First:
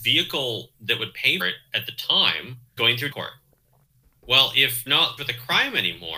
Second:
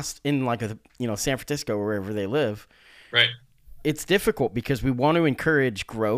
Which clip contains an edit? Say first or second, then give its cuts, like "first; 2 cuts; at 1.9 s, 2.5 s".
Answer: first; 5 cuts; at 1.4 s, 2.8 s, 3.1 s, 4.9 s, 5.2 s